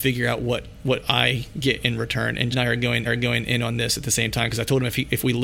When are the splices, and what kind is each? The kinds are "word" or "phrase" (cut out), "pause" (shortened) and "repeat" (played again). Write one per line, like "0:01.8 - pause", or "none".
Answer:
0:02.5 - word
0:03.0 - repeat